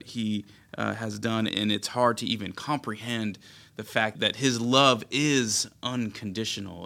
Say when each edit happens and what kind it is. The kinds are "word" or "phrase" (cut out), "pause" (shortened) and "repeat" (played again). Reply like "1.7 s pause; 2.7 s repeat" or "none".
1.5 s word; 4.1 s word